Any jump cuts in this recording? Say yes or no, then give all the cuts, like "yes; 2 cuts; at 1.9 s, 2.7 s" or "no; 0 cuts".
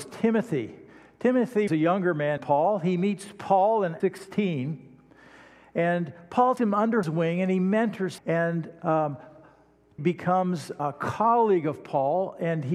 yes; 8 cuts; at 1.7 s, 2.4 s, 4.0 s, 6.6 s, 7.0 s, 8.2 s, 10.0 s, 10.8 s